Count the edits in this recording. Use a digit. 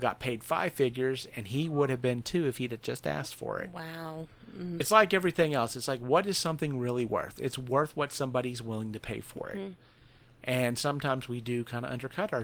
0